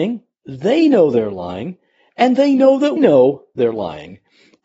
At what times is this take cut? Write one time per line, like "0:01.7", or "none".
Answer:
0:03.0